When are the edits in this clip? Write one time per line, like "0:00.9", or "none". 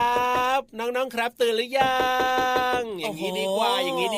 none